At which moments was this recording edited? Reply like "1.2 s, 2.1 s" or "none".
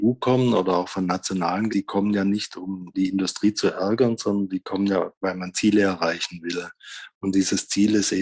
1.7 s, 2.9 s